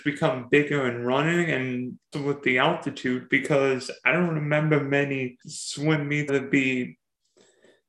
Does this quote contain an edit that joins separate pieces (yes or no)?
yes